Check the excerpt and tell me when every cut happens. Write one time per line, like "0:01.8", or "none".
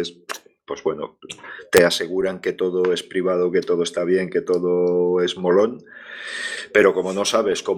none